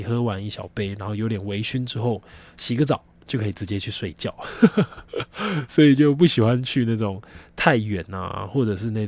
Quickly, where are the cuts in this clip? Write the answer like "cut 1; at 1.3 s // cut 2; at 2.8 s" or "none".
none